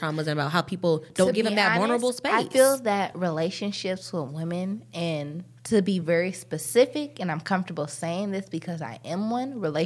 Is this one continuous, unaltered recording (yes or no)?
yes